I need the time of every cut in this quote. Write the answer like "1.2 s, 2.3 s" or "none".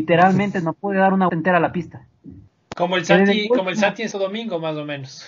1.3 s, 2.7 s, 4.1 s